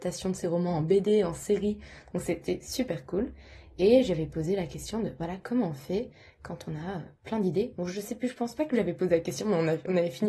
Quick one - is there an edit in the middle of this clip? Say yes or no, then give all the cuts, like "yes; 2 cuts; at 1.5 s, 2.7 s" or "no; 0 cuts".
no; 0 cuts